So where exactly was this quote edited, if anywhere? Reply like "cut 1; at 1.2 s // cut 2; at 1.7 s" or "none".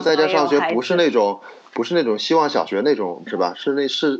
cut 1; at 3.3 s